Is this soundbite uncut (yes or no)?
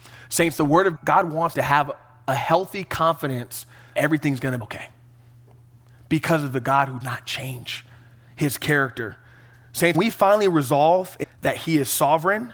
no